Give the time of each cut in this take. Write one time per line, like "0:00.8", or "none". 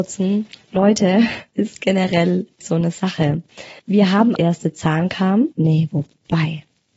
0:01.5
0:02.6
0:03.8
0:04.4
0:05.5